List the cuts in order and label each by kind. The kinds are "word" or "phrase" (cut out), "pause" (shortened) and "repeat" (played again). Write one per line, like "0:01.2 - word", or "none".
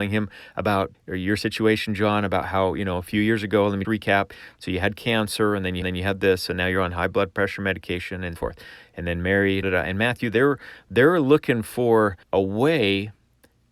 0:00.9 - word
0:03.8 - word
0:05.8 - repeat
0:08.4 - word
0:09.6 - word
0:12.2 - pause